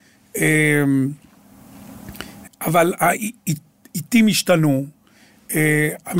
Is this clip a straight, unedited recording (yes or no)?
no